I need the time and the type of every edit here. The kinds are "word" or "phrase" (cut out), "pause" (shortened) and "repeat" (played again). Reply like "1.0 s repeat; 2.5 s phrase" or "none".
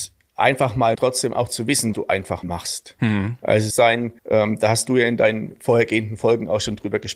0.9 s phrase; 1.9 s word; 2.4 s word; 3.7 s phrase; 4.2 s pause